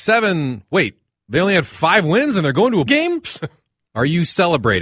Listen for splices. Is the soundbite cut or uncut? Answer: cut